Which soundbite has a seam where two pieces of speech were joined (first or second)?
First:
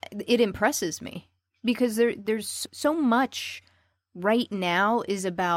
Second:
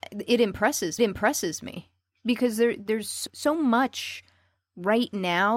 second